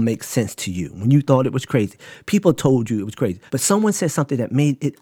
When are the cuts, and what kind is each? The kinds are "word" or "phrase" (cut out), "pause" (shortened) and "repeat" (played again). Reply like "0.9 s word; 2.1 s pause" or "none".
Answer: 3.5 s pause